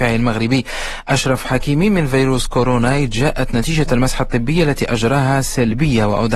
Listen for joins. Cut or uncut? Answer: uncut